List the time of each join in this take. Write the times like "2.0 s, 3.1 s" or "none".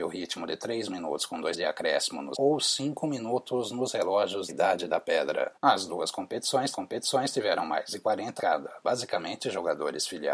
1.5 s, 2.3 s, 4.5 s, 5.6 s, 6.7 s, 8.4 s